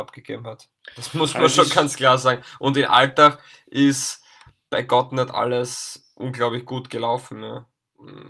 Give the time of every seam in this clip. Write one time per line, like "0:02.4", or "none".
none